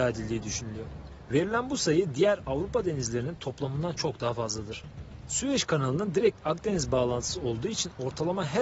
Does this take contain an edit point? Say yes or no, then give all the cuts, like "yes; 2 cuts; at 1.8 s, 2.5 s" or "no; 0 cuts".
no; 0 cuts